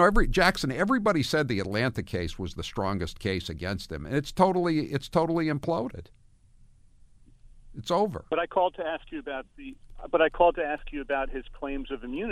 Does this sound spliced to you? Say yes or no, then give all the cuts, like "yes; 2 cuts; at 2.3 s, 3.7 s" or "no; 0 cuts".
no; 0 cuts